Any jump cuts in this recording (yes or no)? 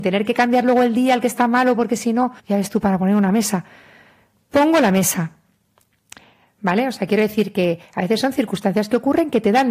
yes